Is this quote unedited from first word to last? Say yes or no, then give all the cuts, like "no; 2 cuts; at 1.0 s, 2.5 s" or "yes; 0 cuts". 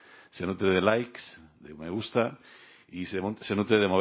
yes; 0 cuts